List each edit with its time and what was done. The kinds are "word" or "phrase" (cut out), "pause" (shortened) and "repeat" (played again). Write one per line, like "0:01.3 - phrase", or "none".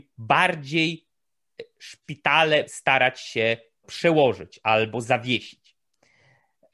0:02.7 - word
0:03.8 - word